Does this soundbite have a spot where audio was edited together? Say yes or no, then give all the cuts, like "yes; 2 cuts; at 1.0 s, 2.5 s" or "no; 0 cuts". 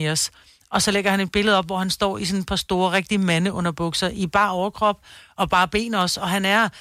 no; 0 cuts